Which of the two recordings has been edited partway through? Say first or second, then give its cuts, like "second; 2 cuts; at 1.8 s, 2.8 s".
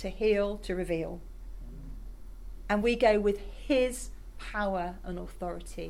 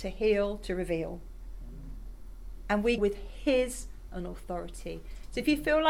second; 2 cuts; at 3.0 s, 4.1 s